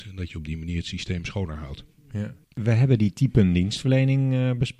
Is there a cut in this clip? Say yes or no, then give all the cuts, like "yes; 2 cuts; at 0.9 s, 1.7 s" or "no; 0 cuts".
yes; 1 cut; at 2.4 s